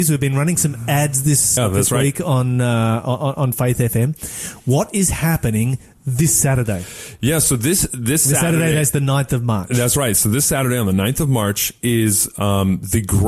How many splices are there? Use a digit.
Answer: 1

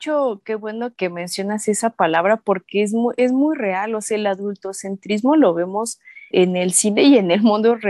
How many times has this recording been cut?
2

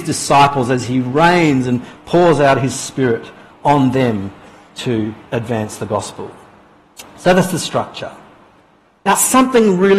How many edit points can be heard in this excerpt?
0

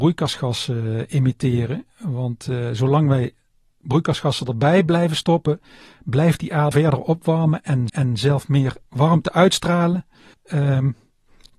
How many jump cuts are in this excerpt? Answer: 4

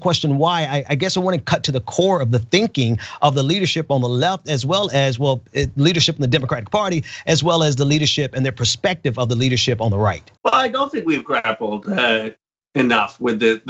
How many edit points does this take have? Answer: 1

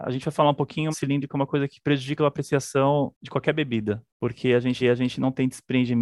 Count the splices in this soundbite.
3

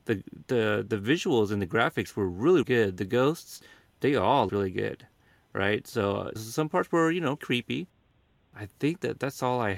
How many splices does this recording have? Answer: 4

